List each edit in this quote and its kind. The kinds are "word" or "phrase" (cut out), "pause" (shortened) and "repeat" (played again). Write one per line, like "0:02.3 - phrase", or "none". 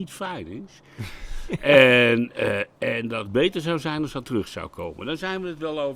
0:03.3 - word
0:04.2 - word